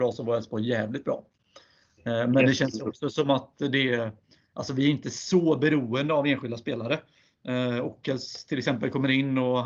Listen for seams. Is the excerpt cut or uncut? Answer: uncut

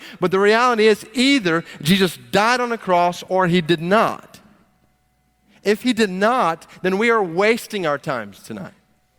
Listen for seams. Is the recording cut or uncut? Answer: uncut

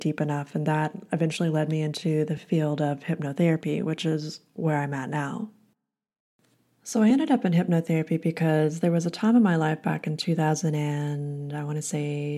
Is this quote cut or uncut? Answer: uncut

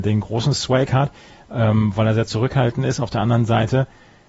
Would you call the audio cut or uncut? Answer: uncut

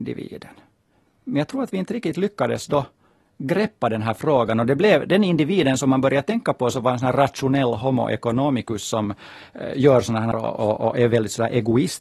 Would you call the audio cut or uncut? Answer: cut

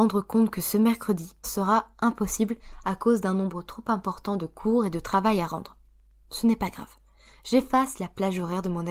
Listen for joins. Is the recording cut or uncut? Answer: cut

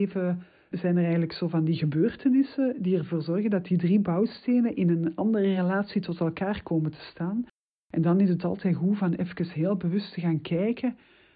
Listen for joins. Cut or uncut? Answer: uncut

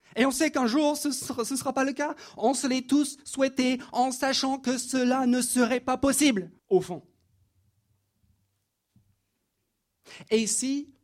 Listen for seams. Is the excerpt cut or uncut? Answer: cut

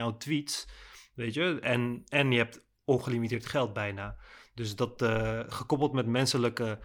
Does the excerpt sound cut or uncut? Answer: uncut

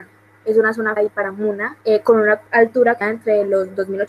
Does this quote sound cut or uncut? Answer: cut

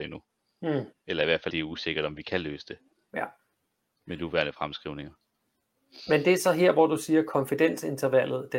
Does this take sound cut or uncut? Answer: cut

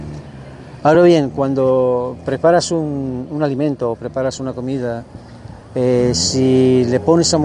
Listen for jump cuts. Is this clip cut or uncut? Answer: uncut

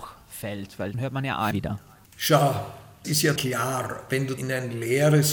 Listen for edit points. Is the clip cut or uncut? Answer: cut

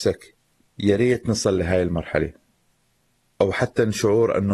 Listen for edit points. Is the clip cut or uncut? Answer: uncut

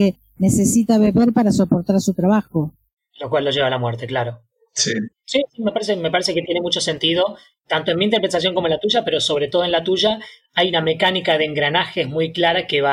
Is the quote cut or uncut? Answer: uncut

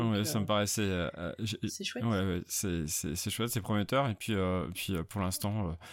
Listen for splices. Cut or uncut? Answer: uncut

